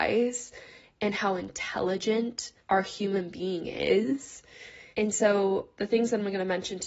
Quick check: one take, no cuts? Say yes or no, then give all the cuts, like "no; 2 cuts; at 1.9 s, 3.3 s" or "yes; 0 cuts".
no; 2 cuts; at 2.6 s, 4.9 s